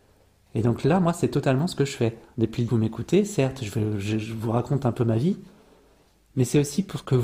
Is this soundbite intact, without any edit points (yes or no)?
no